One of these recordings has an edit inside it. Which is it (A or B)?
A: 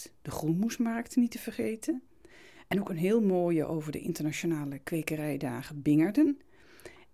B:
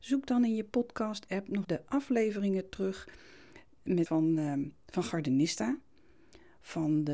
B